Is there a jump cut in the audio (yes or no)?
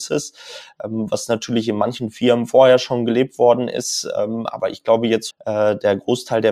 yes